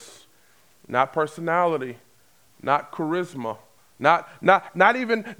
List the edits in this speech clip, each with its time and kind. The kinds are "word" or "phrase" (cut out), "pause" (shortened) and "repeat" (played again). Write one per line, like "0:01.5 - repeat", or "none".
0:03.8 - pause